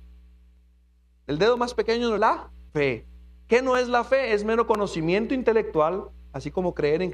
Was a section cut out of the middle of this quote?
yes; 2 cuts; at 2.2 s, 2.7 s

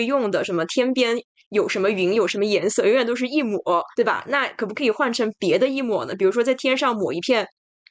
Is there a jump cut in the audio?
yes; 1 cut; at 3.9 s

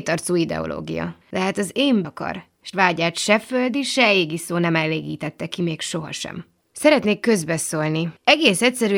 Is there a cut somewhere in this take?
yes; 3 cuts; at 1.2 s, 2.0 s, 2.7 s

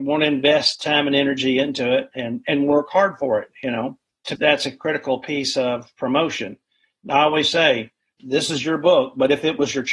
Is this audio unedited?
no; 1 cut; at 4.4 s

